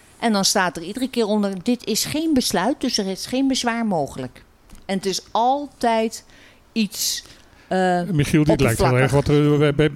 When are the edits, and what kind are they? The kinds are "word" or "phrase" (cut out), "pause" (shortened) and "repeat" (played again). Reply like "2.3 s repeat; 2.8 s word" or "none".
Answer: none